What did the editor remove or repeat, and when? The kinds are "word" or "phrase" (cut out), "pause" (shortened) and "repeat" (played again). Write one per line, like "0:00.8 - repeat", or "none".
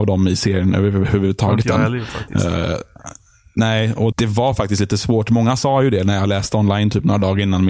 0:04.1 - word